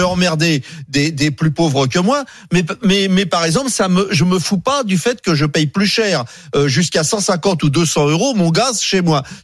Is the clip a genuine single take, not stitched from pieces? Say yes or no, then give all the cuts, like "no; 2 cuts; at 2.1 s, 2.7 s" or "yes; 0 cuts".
yes; 0 cuts